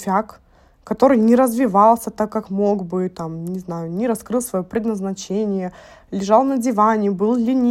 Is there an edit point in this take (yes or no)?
no